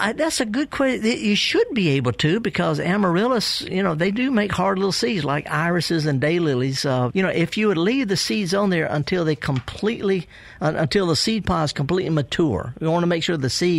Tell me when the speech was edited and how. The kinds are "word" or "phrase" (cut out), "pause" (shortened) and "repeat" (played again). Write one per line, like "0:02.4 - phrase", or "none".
0:07.1 - word